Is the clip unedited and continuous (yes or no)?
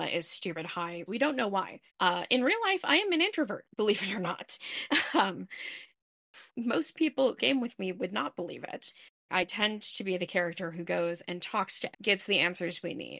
no